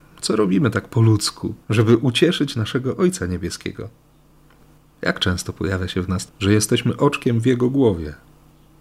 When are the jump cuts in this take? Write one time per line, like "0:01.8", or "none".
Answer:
0:01.6
0:06.3